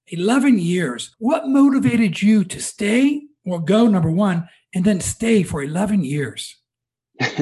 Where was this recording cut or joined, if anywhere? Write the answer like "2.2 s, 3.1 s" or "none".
none